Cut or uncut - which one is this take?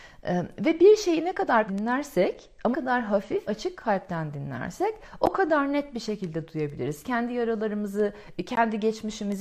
cut